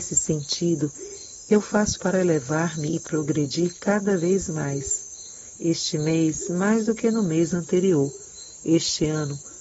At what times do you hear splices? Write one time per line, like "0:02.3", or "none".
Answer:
0:02.0